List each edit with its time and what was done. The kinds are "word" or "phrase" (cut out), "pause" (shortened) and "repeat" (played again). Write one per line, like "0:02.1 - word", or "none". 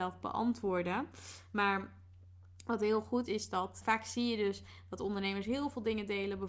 0:03.3 - word
0:03.8 - word